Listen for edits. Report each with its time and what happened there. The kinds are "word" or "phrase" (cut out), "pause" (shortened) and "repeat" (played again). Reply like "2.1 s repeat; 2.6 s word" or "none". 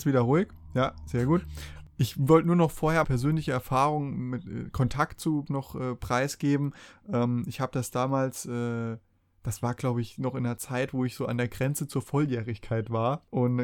3.0 s word; 5.5 s word

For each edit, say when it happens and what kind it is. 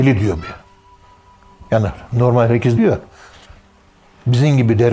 2.8 s word

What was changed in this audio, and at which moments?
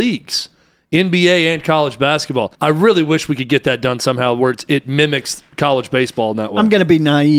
2.5 s pause

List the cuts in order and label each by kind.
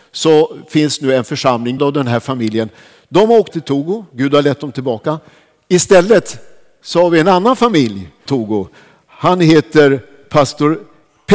1.8 s word; 3.5 s word; 8.3 s word

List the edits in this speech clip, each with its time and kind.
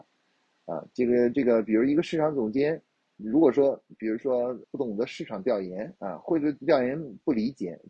3.2 s word; 4.6 s word; 6.0 s pause

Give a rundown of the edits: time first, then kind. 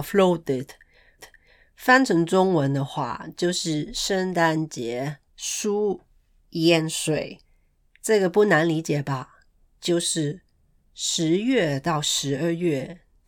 1.2 s repeat; 5.3 s pause; 7.4 s pause

